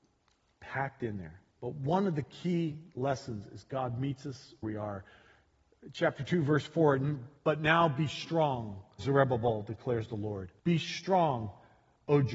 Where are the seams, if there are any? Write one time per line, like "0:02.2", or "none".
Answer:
0:01.5
0:02.9
0:04.6
0:07.4
0:09.0
0:10.6